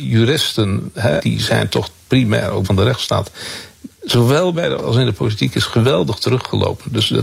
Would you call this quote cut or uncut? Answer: cut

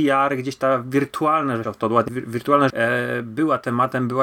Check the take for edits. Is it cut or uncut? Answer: cut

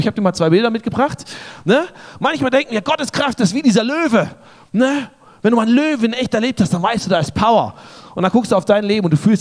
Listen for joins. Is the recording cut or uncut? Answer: uncut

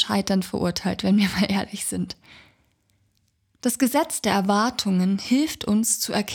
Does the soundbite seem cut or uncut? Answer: uncut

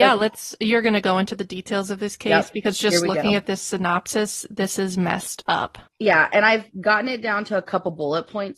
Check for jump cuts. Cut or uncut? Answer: cut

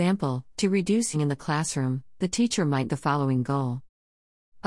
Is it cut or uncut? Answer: cut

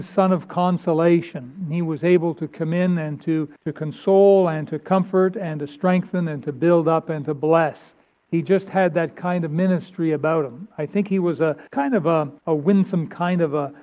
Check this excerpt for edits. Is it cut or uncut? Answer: cut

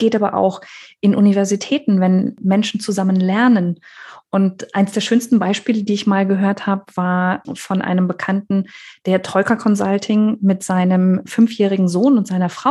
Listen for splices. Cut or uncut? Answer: uncut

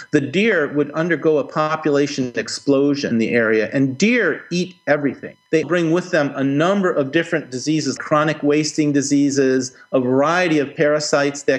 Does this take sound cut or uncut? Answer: cut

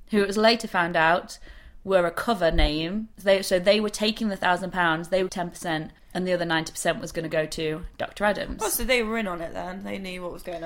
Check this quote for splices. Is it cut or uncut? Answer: cut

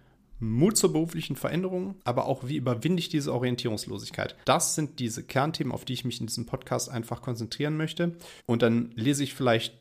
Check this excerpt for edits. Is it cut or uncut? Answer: cut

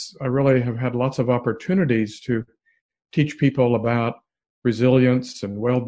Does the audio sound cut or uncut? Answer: uncut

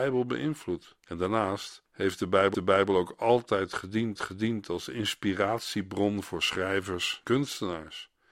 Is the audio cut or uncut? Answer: cut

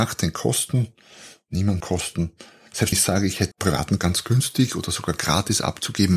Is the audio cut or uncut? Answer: cut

